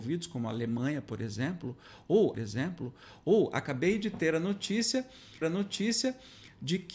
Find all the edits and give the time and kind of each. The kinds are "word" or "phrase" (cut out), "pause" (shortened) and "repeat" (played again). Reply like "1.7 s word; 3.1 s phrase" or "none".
2.3 s repeat; 5.4 s repeat